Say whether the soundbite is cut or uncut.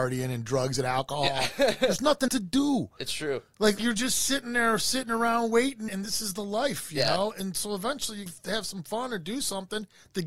cut